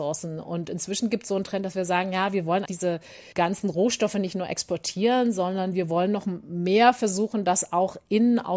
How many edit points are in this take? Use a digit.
2